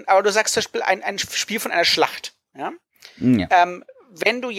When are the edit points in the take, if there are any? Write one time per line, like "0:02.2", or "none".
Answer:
none